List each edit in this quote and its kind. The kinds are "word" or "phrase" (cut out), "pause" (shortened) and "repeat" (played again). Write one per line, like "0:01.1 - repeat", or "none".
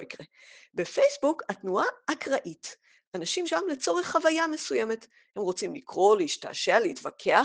0:03.4 - word